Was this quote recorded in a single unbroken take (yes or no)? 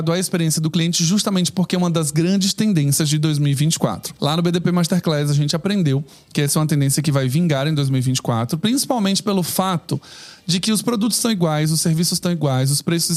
yes